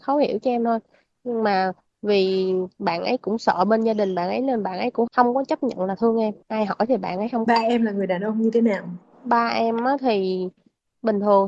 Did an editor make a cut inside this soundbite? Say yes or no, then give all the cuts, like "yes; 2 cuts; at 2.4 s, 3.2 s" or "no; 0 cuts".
yes; 2 cuts; at 6.4 s, 7.5 s